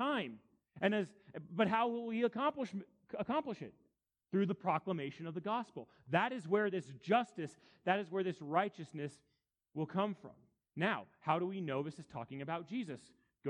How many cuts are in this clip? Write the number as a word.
zero